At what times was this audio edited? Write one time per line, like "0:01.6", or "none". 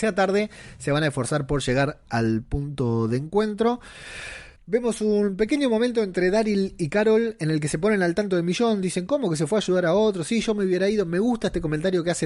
0:04.6

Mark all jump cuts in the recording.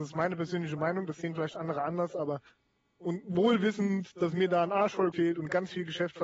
0:05.1

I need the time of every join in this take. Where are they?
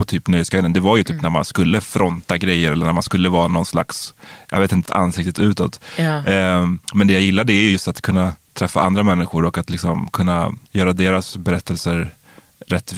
0:04.9
0:06.8
0:10.7

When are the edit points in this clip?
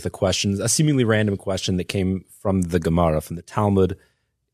none

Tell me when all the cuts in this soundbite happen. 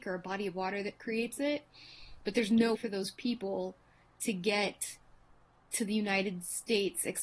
0:02.7

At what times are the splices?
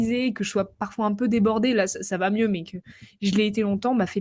none

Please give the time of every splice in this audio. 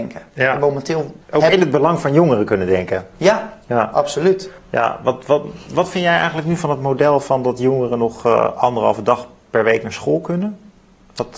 0:01.2
0:04.6

